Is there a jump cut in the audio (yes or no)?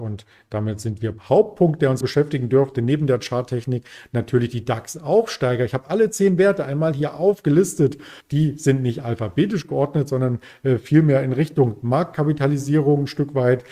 yes